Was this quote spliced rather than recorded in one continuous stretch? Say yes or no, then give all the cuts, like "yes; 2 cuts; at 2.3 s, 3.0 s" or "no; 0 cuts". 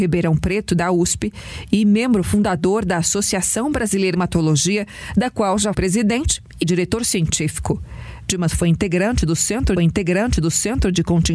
yes; 4 cuts; at 4.1 s, 5.7 s, 6.6 s, 9.8 s